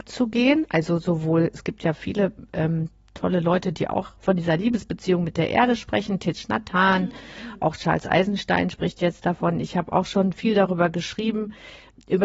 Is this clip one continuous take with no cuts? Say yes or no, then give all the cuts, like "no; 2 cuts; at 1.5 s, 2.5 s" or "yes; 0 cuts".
yes; 0 cuts